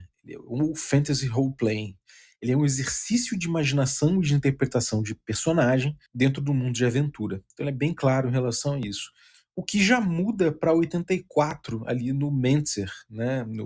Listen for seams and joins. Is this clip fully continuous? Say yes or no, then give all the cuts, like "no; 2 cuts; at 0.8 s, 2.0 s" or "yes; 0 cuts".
no; 1 cut; at 6.1 s